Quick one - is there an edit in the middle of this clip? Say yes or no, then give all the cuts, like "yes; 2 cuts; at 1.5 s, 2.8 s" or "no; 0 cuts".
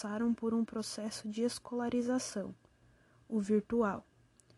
no; 0 cuts